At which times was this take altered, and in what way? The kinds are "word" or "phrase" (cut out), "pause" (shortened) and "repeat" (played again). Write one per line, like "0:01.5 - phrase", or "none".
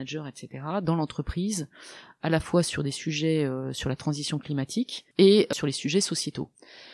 0:05.1 - pause